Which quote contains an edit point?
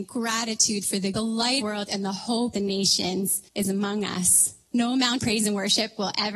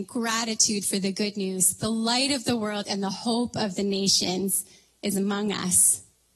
first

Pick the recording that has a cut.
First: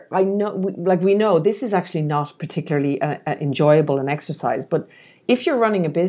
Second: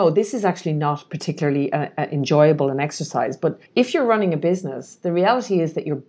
second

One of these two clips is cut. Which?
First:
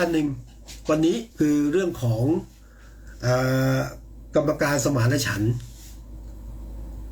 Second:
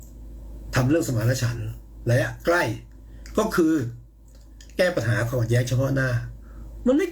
first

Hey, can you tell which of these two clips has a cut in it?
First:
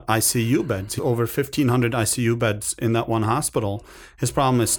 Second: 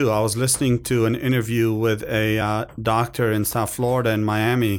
first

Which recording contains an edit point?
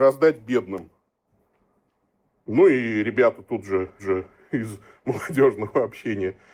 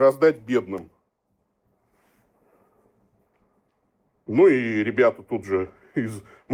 first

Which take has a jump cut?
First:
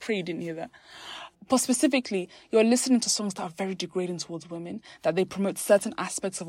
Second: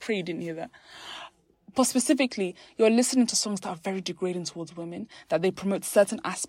first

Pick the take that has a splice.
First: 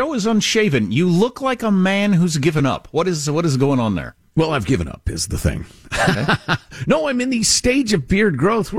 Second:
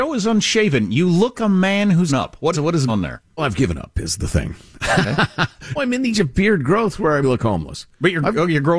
second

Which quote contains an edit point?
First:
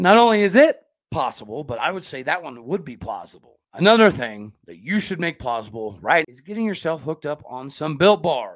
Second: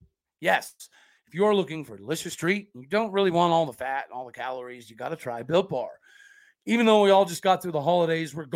first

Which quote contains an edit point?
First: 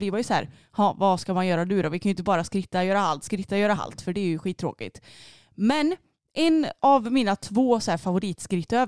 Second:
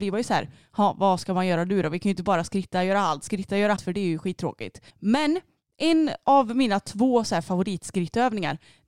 second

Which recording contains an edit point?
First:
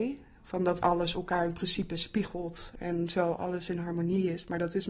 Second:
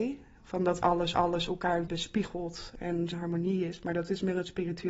second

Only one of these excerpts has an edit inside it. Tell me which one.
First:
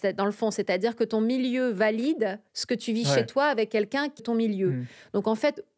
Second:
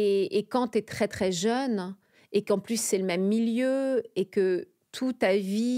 first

